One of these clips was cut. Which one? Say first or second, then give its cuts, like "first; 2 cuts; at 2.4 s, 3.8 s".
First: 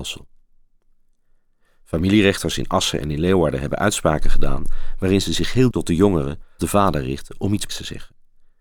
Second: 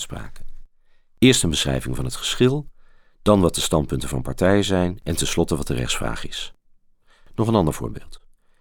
first; 3 cuts; at 5.7 s, 6.6 s, 7.7 s